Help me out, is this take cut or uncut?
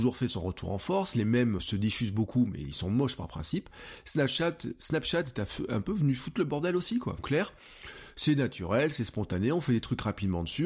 cut